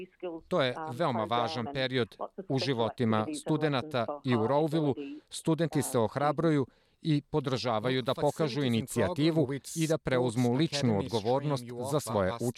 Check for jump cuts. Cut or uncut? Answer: uncut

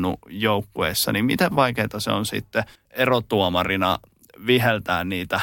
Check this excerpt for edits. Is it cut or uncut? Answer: cut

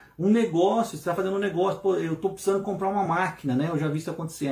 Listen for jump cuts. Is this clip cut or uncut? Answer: uncut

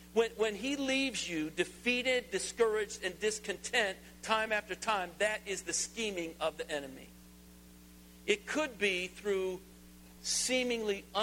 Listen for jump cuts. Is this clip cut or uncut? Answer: uncut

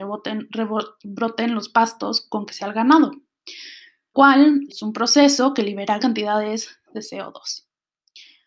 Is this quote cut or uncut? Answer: cut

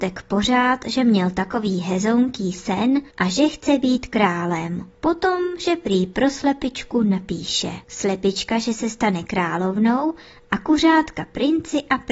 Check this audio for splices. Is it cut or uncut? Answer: cut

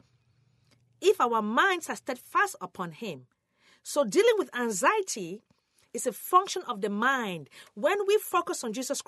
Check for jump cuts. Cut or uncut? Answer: uncut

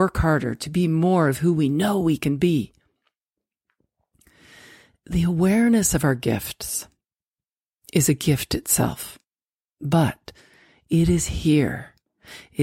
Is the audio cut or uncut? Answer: uncut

